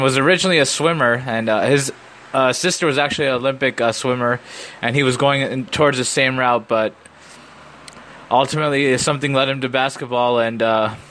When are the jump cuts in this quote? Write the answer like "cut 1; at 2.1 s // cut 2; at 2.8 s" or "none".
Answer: cut 1; at 5.7 s